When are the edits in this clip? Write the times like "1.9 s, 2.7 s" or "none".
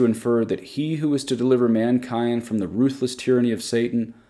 none